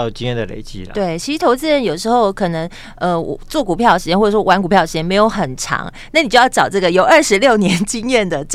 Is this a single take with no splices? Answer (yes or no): yes